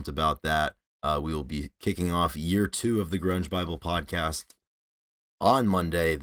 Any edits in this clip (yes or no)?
no